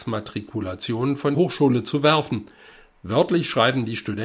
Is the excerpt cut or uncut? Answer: cut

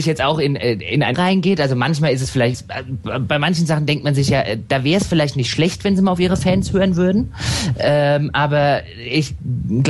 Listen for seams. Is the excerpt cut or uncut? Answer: cut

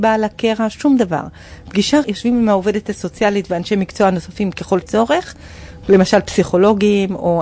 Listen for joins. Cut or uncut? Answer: cut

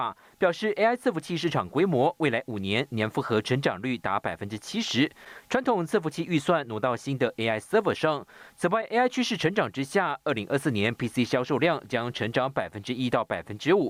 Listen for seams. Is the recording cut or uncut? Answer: uncut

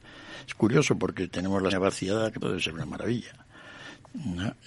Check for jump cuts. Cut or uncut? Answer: cut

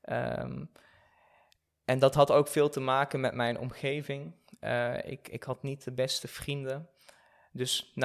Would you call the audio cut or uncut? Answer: uncut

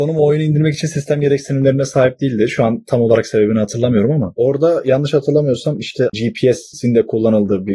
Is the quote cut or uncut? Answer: uncut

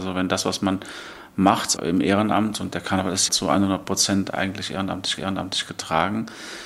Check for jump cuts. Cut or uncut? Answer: cut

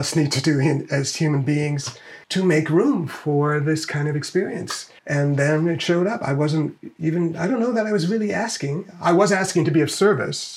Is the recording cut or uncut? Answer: cut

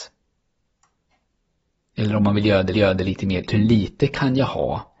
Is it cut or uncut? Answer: cut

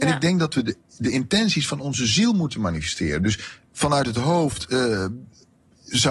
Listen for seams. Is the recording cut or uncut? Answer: uncut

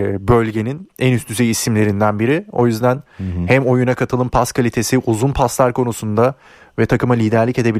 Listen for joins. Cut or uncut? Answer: uncut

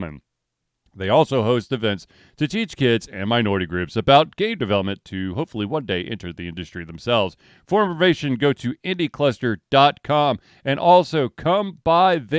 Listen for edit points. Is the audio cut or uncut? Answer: uncut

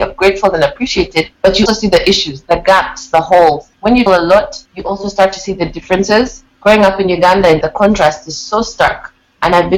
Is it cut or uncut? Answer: cut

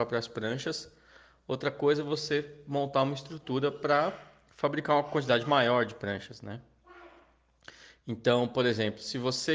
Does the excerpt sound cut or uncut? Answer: uncut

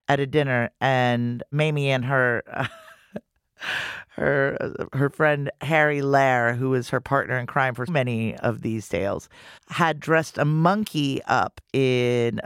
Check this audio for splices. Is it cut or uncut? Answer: cut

